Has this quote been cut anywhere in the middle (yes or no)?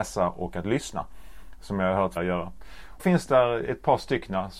yes